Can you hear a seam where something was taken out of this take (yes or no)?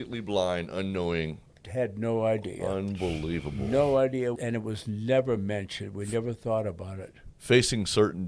yes